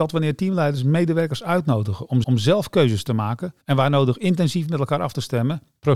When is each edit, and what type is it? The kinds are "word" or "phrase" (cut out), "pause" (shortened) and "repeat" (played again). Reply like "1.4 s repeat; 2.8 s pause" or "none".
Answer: 2.2 s repeat; 3.6 s pause